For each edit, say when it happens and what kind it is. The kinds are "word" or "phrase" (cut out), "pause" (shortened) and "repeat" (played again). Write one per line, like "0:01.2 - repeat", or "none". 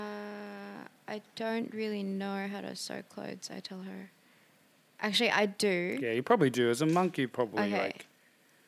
none